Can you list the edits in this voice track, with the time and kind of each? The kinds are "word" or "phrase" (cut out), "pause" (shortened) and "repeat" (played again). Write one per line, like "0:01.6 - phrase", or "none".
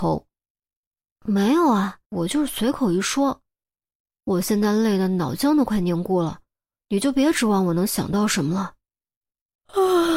0:02.0 - pause

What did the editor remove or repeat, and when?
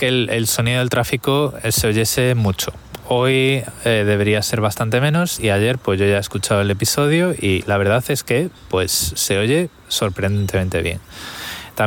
none

